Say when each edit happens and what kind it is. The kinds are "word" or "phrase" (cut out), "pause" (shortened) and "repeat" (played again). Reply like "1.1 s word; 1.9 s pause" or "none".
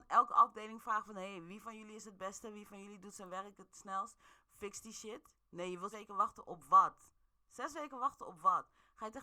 5.9 s word